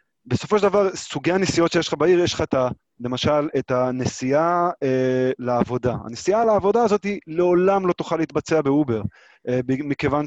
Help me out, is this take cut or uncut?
uncut